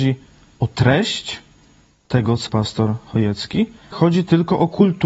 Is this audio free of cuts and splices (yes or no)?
no